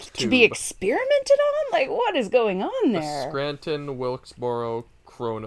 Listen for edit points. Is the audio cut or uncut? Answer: uncut